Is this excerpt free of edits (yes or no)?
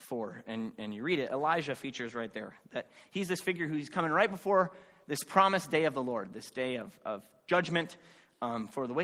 yes